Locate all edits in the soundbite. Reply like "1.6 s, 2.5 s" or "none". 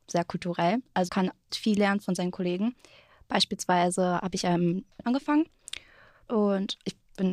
1.1 s, 1.5 s, 5.0 s, 6.3 s